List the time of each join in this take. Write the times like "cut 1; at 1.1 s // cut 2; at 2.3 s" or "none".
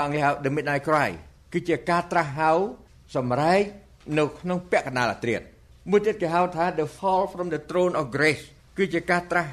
cut 1; at 7.0 s